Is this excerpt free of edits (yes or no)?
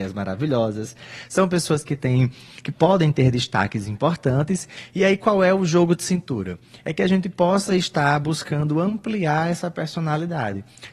yes